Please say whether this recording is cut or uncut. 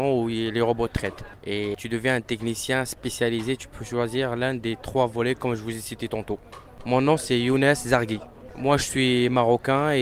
uncut